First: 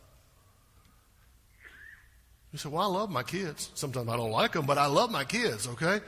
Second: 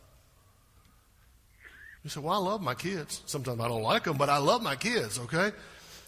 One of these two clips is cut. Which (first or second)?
second